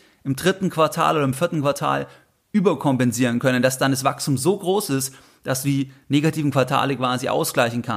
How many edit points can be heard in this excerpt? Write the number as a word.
zero